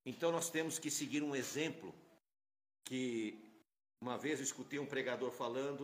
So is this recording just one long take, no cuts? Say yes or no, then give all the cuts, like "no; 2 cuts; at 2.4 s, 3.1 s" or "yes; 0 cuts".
yes; 0 cuts